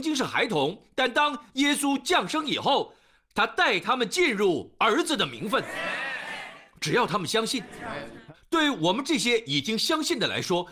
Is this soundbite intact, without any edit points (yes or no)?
yes